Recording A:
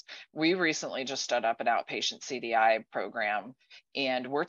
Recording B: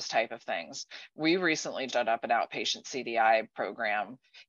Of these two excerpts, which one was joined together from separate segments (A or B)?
B